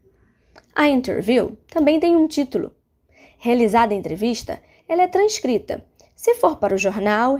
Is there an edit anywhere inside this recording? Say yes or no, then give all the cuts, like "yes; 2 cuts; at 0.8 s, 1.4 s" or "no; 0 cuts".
no; 0 cuts